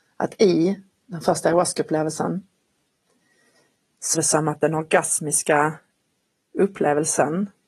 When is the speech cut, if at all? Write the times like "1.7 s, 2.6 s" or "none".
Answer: 1.0 s, 4.1 s